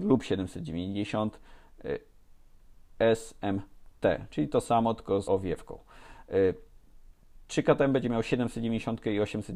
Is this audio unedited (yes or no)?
no